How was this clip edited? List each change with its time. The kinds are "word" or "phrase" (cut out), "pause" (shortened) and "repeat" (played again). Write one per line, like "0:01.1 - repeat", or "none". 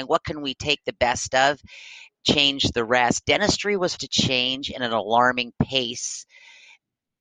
0:04.0 - word